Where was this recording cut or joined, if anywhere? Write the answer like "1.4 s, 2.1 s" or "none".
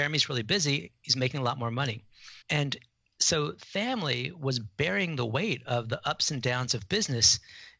2.4 s, 3.6 s